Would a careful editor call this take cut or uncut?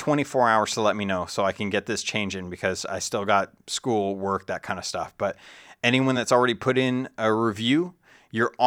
uncut